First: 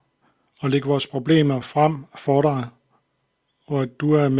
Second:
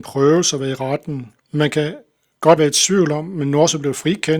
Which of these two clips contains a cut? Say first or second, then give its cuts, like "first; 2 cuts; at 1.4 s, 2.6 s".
second; 2 cuts; at 1.4 s, 2.6 s